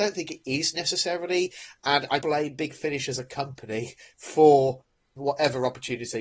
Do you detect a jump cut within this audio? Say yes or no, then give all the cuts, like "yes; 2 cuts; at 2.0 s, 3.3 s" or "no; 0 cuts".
yes; 2 cuts; at 2.2 s, 5.2 s